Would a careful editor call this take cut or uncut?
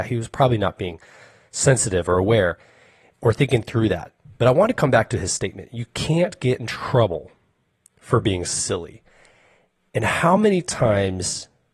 uncut